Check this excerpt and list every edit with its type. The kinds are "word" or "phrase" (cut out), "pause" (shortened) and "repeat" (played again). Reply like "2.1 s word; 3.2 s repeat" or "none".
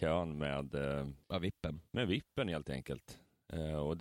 1.2 s pause